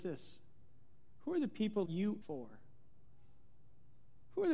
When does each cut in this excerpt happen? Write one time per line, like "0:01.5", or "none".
0:01.9
0:02.2